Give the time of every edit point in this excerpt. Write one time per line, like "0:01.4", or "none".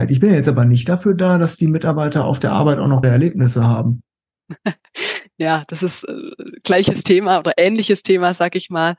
0:03.0